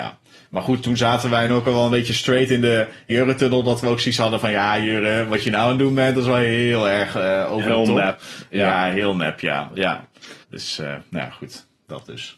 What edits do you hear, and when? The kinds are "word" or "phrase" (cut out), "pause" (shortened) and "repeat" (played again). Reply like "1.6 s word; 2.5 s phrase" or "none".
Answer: 1.5 s word; 3.1 s word; 10.4 s pause

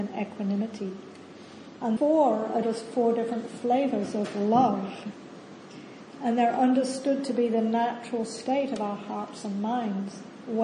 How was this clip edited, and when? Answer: 2.0 s word; 2.6 s word

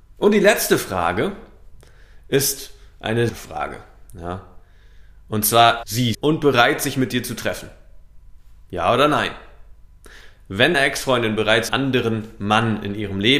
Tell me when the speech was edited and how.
3.3 s phrase; 5.8 s word; 6.1 s word; 10.7 s word; 11.7 s word

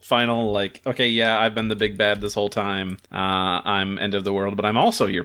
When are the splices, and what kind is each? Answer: 3.0 s pause

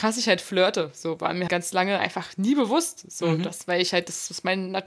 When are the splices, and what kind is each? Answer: 1.5 s word

